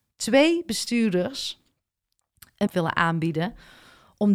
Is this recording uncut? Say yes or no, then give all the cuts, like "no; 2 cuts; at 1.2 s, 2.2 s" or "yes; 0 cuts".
no; 1 cut; at 2.7 s